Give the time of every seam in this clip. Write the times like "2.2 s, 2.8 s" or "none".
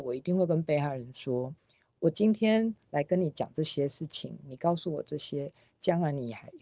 1.6 s